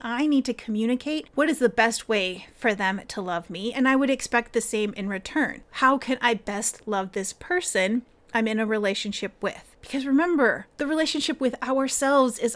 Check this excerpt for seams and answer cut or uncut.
uncut